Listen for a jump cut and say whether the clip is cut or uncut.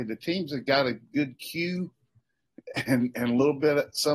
uncut